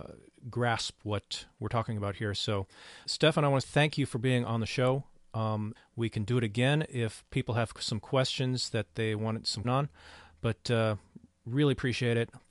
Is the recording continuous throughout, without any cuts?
no; 4 cuts; at 3.0 s, 3.6 s, 5.8 s, 9.6 s

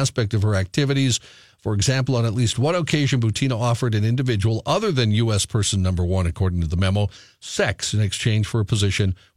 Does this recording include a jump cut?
no; 0 cuts

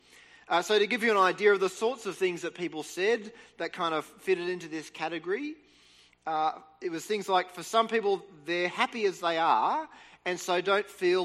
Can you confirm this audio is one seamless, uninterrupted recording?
yes; 0 cuts

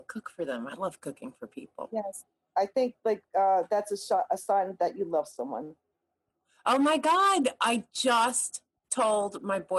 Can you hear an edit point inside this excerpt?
no; 0 cuts

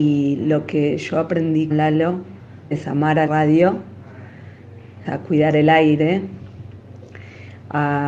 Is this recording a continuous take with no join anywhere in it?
no; 4 cuts; at 1.7 s, 2.7 s, 3.3 s, 5.0 s

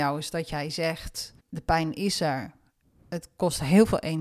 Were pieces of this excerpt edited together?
yes; 1 cut; at 1.4 s

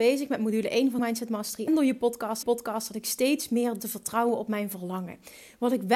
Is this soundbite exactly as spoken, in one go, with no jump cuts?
no; 4 cuts; at 1.0 s, 1.7 s, 2.4 s, 3.8 s

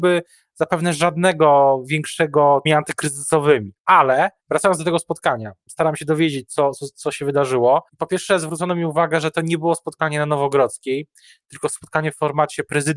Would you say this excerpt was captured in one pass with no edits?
no; 4 cuts; at 2.7 s, 4.4 s, 5.7 s, 7.9 s

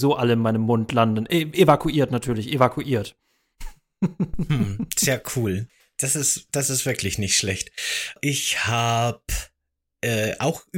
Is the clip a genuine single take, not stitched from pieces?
yes; 0 cuts

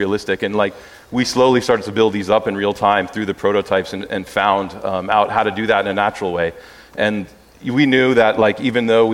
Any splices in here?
no; 0 cuts

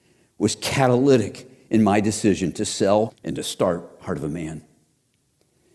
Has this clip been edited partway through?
yes; 1 cut; at 3.1 s

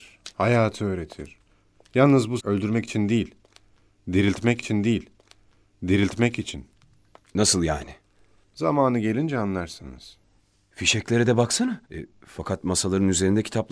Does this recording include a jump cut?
yes; 4 cuts; at 2.4 s, 4.6 s, 10.4 s, 11.8 s

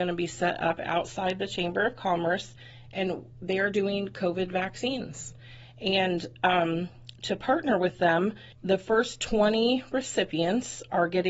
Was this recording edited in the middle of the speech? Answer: yes; 1 cut; at 8.5 s

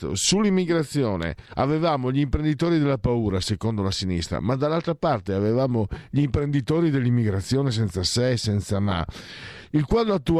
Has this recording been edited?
yes; 1 cut; at 1.5 s

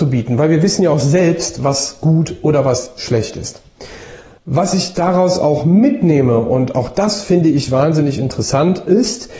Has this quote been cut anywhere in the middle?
yes; 1 cut; at 4.4 s

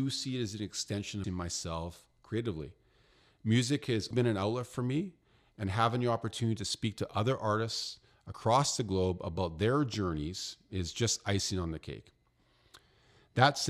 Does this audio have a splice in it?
yes; 2 cuts; at 1.2 s, 4.1 s

